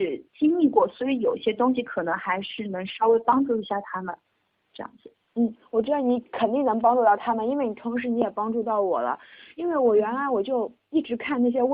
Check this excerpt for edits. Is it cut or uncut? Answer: uncut